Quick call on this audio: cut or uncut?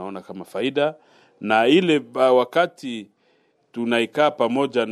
uncut